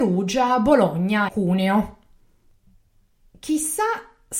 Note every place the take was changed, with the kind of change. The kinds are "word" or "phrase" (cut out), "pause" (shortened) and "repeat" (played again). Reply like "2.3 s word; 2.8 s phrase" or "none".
1.3 s word

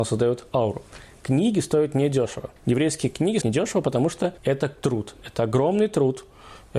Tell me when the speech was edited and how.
2.6 s pause; 3.4 s word; 4.4 s pause

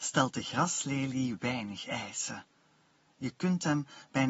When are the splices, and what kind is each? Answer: none

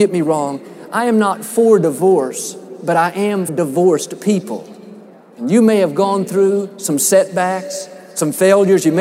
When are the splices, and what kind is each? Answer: 3.5 s word

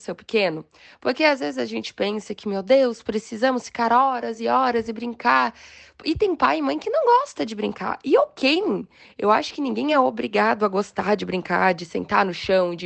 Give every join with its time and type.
none

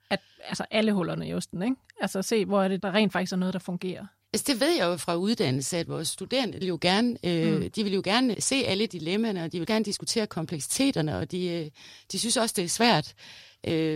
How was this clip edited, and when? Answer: 2.8 s word; 6.6 s phrase; 8.3 s word; 9.6 s word

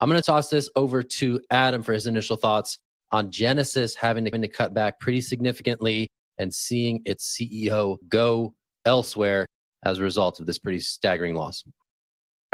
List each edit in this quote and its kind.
4.3 s repeat

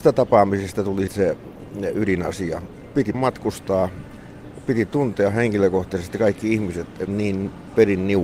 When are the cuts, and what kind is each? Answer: 1.1 s word; 3.1 s word; 7.1 s phrase

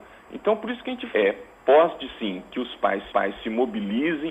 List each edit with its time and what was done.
1.1 s word; 2.1 s word; 3.1 s repeat

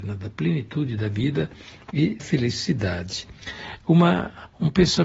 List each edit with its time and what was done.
2.2 s word

